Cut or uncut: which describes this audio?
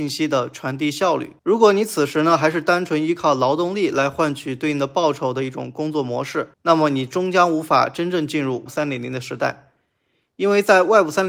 cut